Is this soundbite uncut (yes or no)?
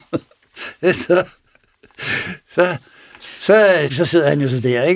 no